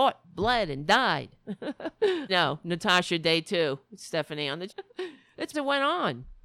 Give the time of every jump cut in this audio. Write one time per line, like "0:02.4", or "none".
0:02.3
0:04.7
0:05.5